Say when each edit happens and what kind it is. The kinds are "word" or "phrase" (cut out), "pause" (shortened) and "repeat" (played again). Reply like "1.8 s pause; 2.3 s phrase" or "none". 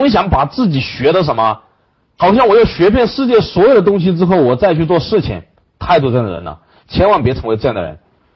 none